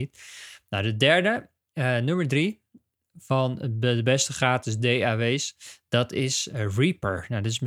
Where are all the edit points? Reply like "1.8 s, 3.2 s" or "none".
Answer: none